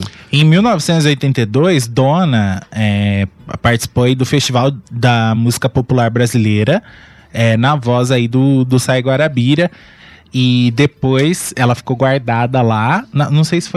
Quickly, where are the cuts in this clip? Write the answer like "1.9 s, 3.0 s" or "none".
none